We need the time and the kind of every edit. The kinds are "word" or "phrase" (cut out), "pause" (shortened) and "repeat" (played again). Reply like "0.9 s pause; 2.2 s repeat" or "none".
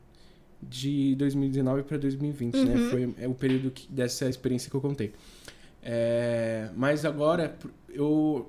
none